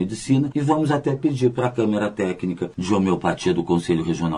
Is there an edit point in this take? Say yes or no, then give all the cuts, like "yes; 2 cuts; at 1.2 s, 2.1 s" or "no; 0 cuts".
no; 0 cuts